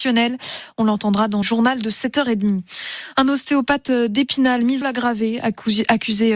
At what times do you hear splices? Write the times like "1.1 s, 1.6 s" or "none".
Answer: 1.4 s, 4.8 s